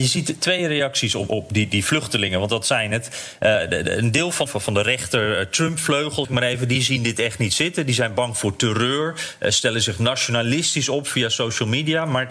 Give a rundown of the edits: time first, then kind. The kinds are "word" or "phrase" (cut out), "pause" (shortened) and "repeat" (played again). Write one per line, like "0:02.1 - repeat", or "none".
0:04.5 - phrase
0:06.2 - word